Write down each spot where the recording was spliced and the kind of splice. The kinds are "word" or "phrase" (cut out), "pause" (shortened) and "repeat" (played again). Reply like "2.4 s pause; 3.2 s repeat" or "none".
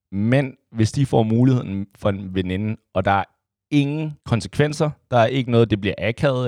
4.2 s pause